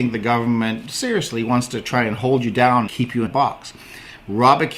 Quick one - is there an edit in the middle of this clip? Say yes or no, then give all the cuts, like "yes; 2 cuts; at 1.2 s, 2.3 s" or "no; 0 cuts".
yes; 2 cuts; at 2.9 s, 3.3 s